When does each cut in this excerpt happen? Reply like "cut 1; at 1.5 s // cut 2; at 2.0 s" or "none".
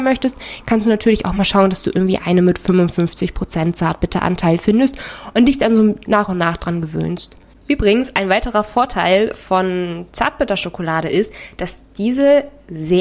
none